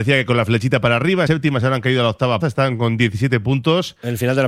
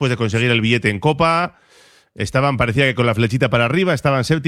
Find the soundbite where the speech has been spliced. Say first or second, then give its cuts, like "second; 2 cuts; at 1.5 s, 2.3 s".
first; 2 cuts; at 1.3 s, 2.4 s